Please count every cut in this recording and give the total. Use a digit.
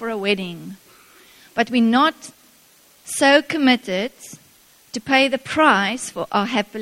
0